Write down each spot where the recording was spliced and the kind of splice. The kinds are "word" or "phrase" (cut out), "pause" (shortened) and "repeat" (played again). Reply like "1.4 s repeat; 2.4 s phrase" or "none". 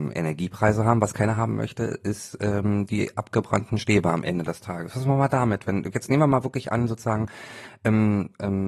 none